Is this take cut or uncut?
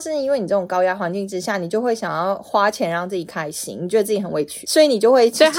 cut